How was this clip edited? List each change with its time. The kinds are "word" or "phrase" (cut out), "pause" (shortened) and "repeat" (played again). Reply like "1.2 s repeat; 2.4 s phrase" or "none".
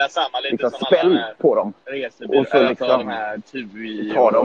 1.8 s pause